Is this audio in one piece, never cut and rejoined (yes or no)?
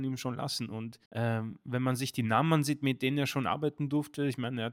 no